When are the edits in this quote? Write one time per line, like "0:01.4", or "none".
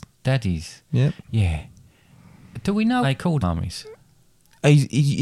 0:03.0
0:03.4